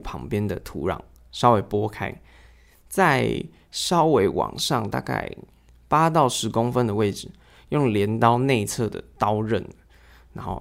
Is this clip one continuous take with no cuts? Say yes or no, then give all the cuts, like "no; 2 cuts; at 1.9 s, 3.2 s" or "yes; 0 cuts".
yes; 0 cuts